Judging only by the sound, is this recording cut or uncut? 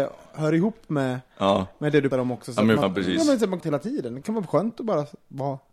cut